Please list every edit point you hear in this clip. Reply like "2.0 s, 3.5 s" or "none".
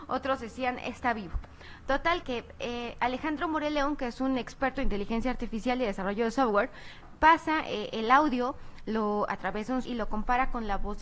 2.2 s, 9.8 s